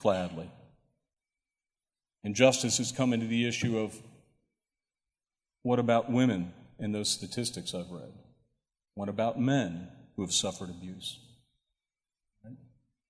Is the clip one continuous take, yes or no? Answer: yes